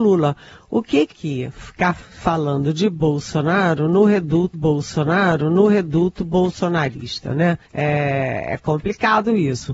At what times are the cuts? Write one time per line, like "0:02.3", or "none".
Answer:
0:01.1
0:04.5
0:07.6